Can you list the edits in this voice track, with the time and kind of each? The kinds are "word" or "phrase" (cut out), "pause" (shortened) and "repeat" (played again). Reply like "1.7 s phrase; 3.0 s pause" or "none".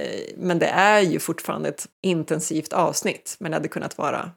1.9 s pause